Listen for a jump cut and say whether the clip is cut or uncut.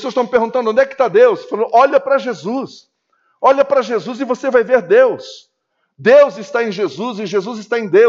uncut